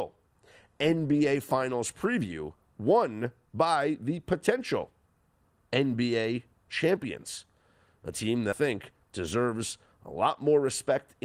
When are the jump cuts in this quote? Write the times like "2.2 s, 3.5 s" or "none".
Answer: 8.5 s